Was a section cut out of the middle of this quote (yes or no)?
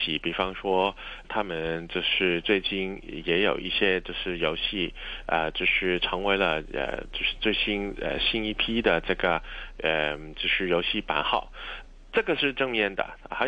yes